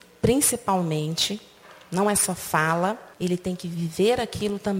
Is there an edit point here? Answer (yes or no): yes